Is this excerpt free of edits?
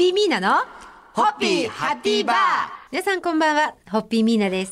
no; 1 cut; at 2.9 s

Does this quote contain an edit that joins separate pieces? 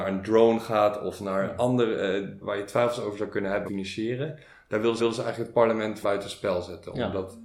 yes; 4 cuts; at 2.4 s, 3.7 s, 5.0 s, 6.0 s

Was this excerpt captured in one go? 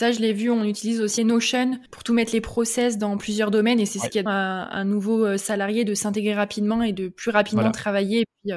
no; 3 cuts; at 1.2 s, 1.9 s, 4.3 s

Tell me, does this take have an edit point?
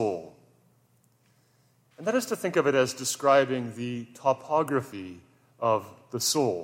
no; 0 cuts

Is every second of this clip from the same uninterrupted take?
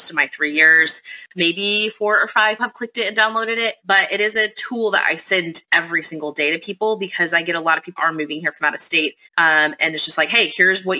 no; 4 cuts; at 2.6 s, 3.8 s, 8.0 s, 9.2 s

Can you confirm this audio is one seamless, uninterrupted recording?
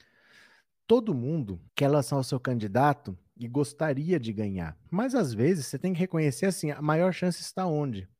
no; 2 cuts; at 1.7 s, 4.9 s

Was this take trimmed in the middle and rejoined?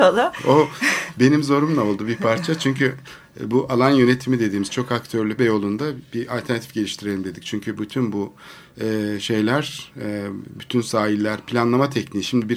yes; 1 cut; at 5.4 s

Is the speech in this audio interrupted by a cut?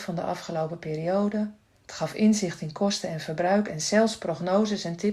yes; 1 cut; at 1.6 s

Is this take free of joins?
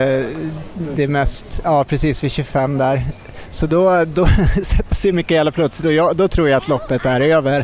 yes; 0 cuts

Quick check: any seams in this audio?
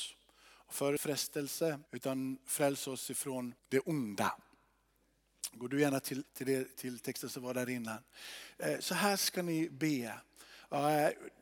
yes; 5 cuts; at 1.0 s, 1.9 s, 3.6 s, 6.2 s, 6.7 s

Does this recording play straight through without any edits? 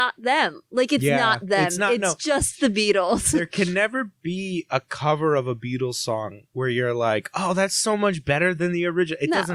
yes; 0 cuts

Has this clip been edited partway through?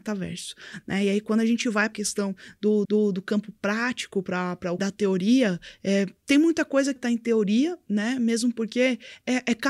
yes; 4 cuts; at 1.9 s, 2.8 s, 4.8 s, 7.0 s

